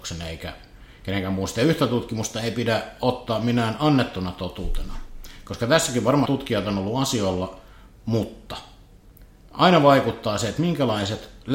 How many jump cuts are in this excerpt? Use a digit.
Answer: 1